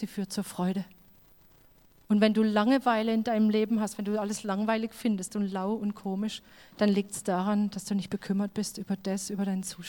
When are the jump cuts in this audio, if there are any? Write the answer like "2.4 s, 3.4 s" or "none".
none